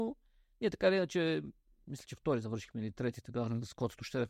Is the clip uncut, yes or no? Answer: yes